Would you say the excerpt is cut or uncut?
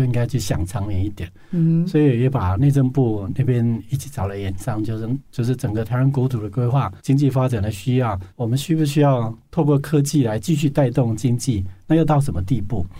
cut